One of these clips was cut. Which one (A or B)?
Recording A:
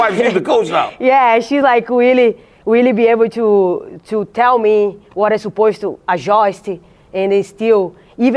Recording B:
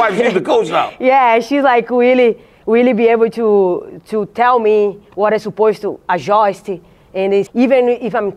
B